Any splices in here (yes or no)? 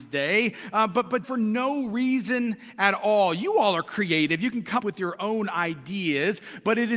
yes